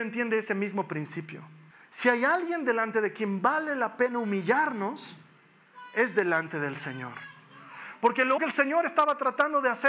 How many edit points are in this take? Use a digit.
2